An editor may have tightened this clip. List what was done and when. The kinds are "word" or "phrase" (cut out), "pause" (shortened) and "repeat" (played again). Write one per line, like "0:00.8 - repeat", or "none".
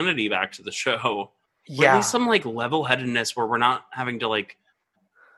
none